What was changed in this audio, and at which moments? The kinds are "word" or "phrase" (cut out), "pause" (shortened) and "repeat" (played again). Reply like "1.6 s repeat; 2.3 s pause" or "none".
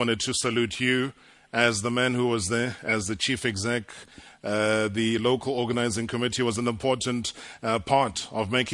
none